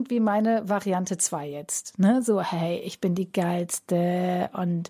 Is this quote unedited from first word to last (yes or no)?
yes